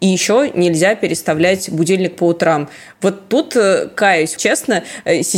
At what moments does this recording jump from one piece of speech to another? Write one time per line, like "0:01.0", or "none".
0:04.4